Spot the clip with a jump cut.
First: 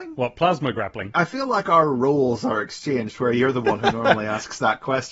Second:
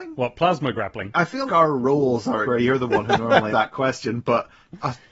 second; 3 cuts; at 1.5 s, 2.4 s, 3.5 s

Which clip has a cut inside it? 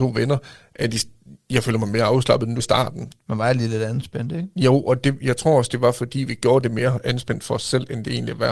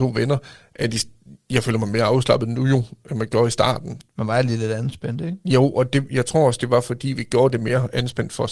first; 1 cut; at 2.6 s

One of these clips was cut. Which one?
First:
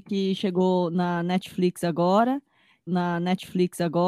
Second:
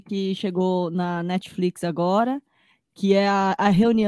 first; 1 cut; at 2.9 s

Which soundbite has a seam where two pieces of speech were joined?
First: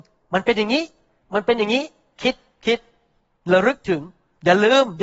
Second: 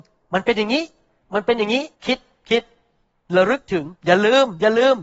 second; 2 cuts; at 1.9 s, 4.0 s

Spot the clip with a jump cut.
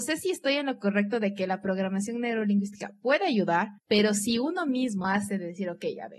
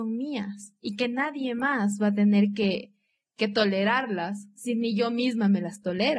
first; 2 cuts; at 3.8 s, 5.0 s

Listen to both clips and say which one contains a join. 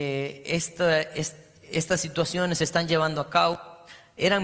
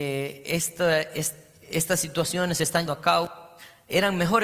second; 1 cut; at 2.9 s

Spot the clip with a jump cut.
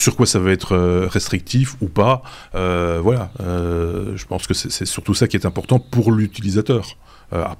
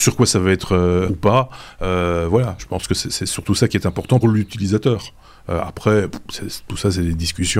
second; 3 cuts; at 1.1 s, 2.6 s, 4.2 s

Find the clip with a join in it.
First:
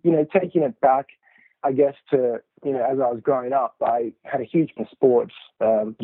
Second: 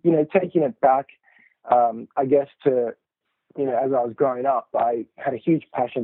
first; 3 cuts; at 1.6 s, 2.5 s, 4.8 s

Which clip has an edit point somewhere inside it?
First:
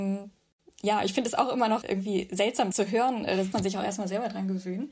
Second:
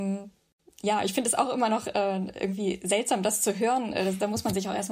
first; 3 cuts; at 1.8 s, 2.7 s, 3.5 s

